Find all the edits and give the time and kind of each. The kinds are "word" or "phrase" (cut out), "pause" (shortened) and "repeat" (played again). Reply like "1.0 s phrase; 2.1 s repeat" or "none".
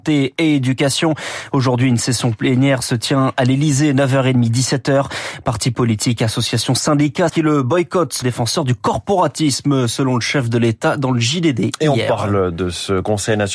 7.3 s word; 8.2 s word